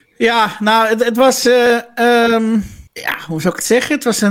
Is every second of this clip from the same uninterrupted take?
no; 1 cut; at 2.9 s

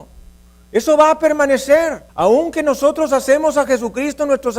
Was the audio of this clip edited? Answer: yes; 1 cut; at 2.1 s

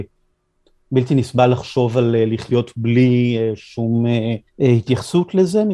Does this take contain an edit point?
yes; 1 cut; at 4.5 s

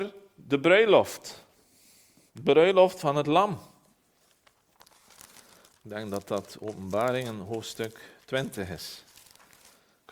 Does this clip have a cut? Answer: no; 0 cuts

